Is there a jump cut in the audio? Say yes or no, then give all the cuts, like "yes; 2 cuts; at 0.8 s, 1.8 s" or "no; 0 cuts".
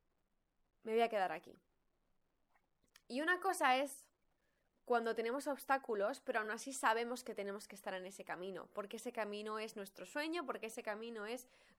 no; 0 cuts